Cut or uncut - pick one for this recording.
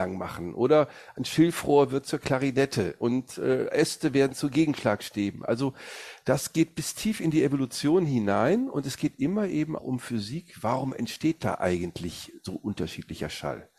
cut